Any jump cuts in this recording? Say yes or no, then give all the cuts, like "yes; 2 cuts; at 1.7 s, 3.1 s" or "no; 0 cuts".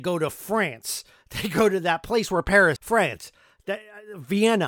yes; 1 cut; at 2.8 s